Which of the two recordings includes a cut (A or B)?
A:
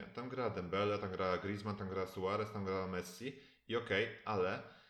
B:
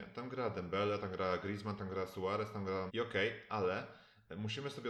B